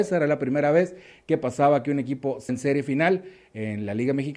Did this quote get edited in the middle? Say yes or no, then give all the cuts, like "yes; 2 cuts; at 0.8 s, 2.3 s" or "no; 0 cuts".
yes; 1 cut; at 2.5 s